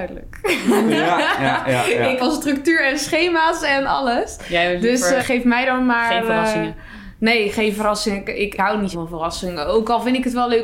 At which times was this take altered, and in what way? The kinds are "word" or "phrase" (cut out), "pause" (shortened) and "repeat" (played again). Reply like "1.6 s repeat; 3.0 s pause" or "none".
2.2 s word; 5.2 s word; 8.6 s word; 8.9 s word